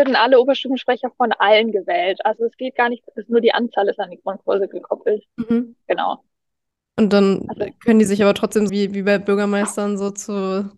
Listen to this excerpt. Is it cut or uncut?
cut